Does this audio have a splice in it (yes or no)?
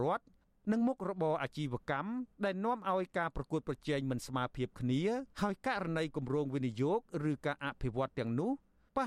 yes